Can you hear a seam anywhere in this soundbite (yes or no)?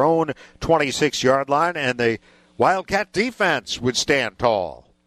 no